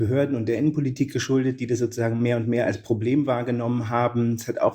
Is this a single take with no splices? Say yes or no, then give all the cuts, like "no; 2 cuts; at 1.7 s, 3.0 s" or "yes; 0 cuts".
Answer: yes; 0 cuts